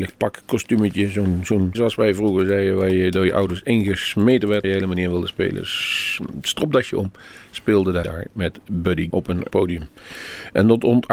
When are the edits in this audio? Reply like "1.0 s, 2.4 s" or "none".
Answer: 1.7 s, 4.6 s, 8.0 s, 9.1 s, 9.5 s